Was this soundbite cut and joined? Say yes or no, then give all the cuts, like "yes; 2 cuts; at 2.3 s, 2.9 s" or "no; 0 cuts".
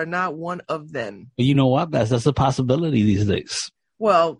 no; 0 cuts